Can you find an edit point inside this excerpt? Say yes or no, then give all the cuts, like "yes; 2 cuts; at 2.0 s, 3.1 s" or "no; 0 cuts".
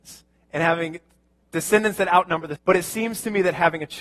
yes; 1 cut; at 2.6 s